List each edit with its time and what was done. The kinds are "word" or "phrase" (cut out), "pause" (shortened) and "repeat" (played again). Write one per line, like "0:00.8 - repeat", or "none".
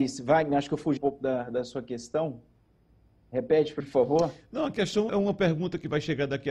0:01.0 - word
0:03.8 - word
0:05.1 - word